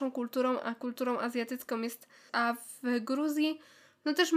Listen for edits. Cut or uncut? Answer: cut